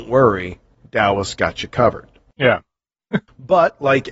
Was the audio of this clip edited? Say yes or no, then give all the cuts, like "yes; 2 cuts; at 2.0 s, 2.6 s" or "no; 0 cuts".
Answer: no; 0 cuts